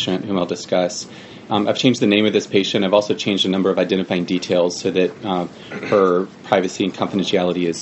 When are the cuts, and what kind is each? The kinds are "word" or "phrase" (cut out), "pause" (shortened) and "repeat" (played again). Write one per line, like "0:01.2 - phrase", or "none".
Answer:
none